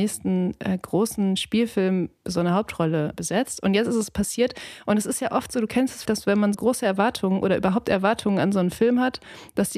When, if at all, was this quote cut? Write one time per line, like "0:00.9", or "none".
0:03.1
0:06.1
0:06.5